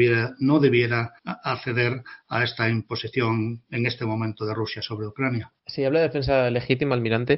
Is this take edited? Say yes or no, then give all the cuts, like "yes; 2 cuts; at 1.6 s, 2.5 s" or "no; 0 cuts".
yes; 2 cuts; at 1.2 s, 5.6 s